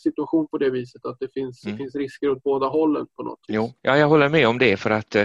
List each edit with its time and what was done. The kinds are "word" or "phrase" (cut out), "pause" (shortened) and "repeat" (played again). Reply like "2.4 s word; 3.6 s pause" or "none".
3.8 s pause

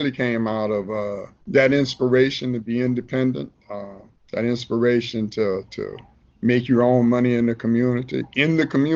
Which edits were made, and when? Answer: 1.4 s pause; 4.1 s pause; 5.7 s word

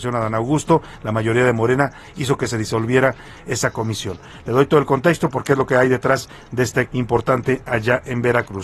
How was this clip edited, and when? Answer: 6.9 s word

